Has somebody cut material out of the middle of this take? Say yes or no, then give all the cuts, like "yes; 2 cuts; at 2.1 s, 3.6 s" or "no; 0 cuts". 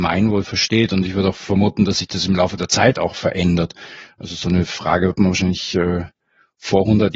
no; 0 cuts